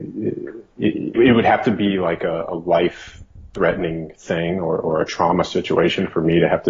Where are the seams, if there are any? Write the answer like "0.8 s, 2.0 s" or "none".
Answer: 1.1 s